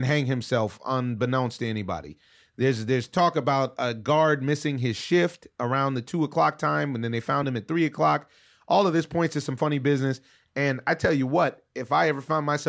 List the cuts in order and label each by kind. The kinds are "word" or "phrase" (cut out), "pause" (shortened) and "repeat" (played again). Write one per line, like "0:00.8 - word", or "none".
none